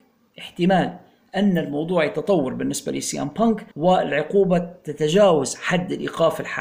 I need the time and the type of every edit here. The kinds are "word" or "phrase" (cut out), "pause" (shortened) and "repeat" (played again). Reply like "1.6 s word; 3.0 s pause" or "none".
3.7 s pause